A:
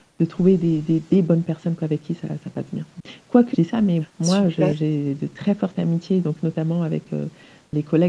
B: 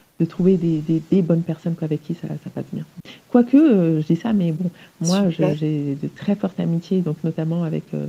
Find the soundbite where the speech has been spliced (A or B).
A